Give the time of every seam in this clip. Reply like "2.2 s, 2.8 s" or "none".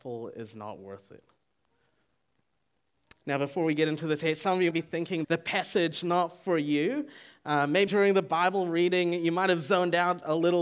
4.7 s, 5.2 s, 6.0 s, 7.9 s